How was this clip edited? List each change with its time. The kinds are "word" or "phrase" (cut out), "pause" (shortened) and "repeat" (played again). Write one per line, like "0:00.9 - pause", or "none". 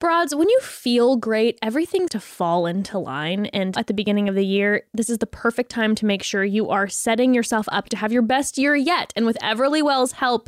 0:02.1 - word
0:03.8 - word

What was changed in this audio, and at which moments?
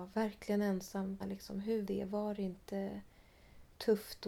0:01.2 - word
0:01.9 - word

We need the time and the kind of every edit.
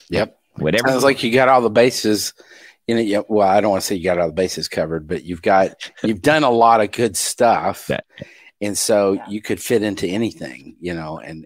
none

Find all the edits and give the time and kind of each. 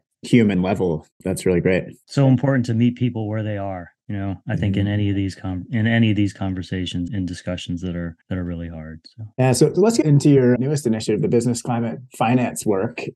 0:04.0 - pause
0:07.1 - word
0:08.2 - pause
0:09.3 - pause
0:10.0 - phrase
0:10.6 - word

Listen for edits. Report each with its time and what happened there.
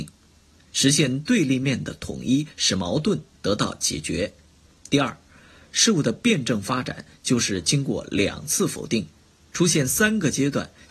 0:04.7 - pause

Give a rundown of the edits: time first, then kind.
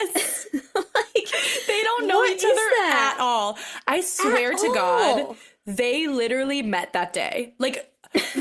none

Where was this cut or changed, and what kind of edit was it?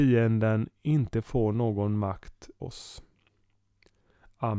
0:02.6 - word

